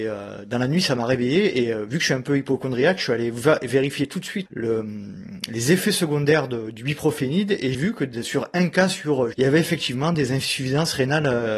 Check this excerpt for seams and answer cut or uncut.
cut